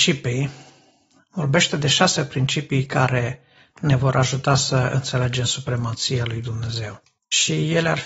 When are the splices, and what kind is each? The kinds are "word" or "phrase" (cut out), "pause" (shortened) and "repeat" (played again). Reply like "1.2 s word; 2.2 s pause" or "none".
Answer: none